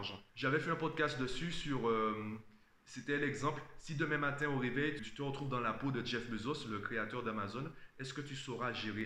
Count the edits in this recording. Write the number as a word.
one